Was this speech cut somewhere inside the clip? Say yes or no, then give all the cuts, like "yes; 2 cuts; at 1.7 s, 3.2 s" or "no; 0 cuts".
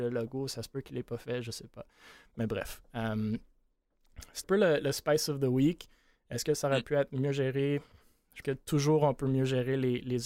yes; 2 cuts; at 4.4 s, 8.4 s